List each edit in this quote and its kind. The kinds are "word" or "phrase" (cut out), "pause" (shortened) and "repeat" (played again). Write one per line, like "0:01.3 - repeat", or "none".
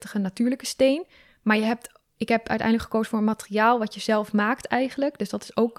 none